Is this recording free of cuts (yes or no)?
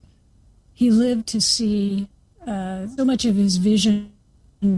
no